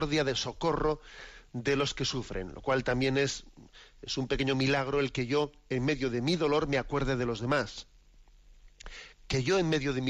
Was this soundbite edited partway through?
no; 0 cuts

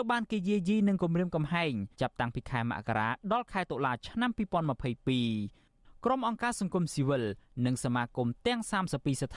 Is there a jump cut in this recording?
yes; 1 cut; at 1.9 s

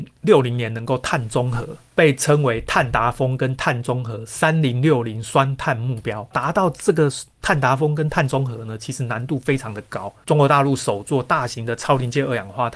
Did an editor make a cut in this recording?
no; 0 cuts

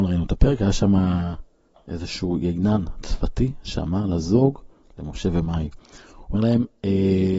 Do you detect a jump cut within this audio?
no; 0 cuts

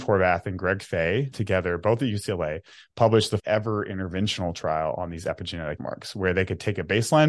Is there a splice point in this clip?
yes; 3 cuts; at 1.3 s, 3.4 s, 5.8 s

